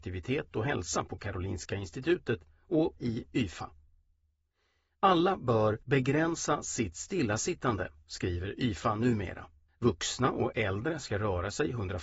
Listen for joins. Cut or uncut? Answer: cut